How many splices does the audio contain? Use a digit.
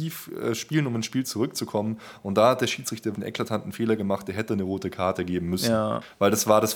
1